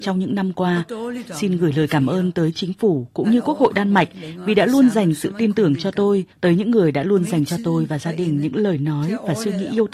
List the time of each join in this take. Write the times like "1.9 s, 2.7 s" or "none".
6.3 s